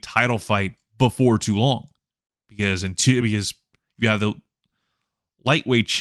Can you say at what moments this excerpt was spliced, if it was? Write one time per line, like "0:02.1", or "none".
none

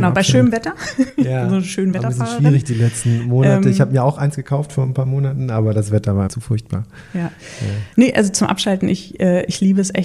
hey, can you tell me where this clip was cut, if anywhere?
0:06.3
0:07.9

